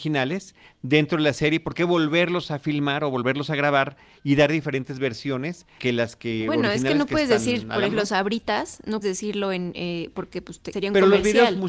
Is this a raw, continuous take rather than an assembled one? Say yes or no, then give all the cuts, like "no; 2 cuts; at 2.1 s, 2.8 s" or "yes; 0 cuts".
no; 4 cuts; at 5.8 s, 7.9 s, 9.0 s, 10.7 s